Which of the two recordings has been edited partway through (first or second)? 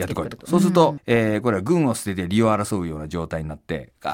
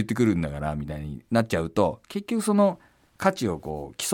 first